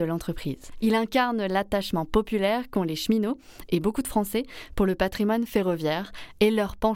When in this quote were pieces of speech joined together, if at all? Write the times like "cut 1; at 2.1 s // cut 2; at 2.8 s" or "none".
none